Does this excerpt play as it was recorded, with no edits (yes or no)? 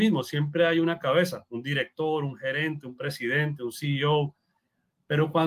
yes